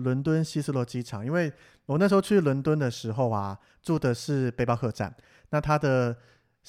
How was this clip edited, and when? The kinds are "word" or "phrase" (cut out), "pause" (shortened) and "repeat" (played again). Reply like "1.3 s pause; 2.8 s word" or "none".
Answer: none